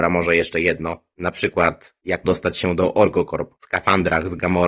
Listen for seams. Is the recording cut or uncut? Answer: cut